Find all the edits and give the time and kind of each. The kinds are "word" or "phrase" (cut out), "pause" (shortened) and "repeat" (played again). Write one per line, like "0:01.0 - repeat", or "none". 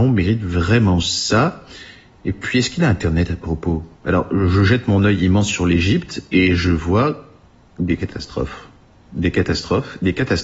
0:03.9 - pause